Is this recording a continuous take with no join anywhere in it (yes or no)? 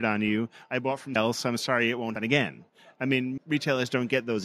no